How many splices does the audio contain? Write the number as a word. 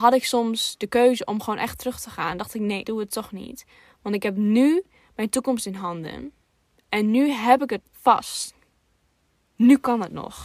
two